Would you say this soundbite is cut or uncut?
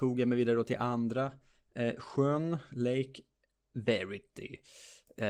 uncut